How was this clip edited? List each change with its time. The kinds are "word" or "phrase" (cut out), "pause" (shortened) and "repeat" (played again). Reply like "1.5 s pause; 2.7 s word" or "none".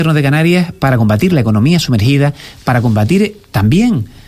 none